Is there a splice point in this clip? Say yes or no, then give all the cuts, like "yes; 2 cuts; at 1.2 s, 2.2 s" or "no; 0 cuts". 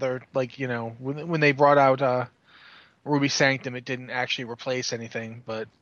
no; 0 cuts